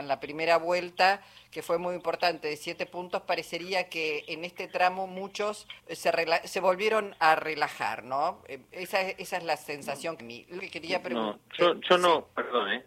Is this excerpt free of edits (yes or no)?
no